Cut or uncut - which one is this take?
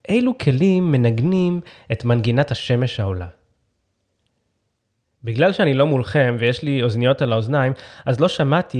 uncut